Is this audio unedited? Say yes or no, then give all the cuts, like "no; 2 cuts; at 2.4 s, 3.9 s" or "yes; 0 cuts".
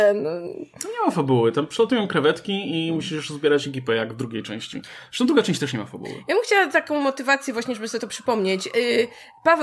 yes; 0 cuts